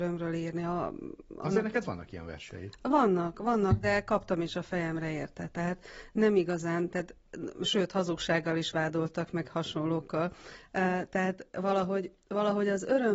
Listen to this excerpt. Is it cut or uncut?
uncut